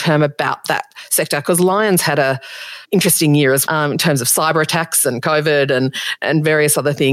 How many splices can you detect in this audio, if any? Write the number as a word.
three